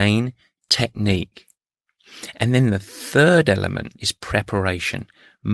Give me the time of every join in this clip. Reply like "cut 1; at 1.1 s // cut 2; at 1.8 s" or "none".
cut 1; at 4.0 s